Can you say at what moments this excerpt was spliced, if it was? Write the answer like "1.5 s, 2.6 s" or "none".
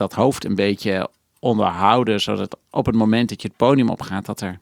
none